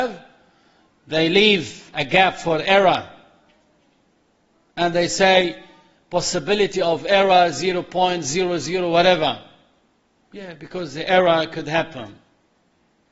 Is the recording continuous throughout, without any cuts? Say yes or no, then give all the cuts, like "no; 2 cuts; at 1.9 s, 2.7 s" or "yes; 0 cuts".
yes; 0 cuts